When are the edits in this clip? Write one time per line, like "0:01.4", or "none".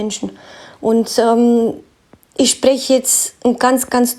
none